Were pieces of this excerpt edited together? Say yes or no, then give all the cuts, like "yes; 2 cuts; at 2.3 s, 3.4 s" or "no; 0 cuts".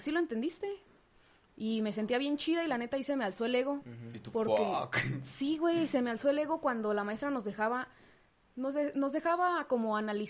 no; 0 cuts